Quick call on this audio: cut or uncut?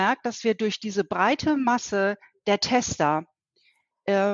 uncut